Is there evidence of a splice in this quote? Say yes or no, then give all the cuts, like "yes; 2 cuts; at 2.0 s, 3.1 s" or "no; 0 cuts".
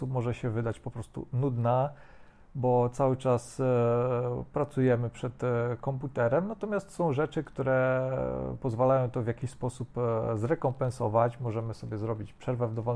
no; 0 cuts